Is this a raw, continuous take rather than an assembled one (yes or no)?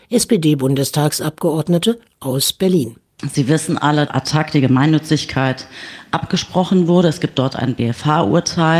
no